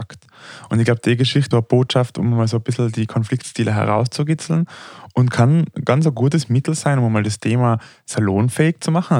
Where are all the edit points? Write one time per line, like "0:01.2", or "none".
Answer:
0:01.5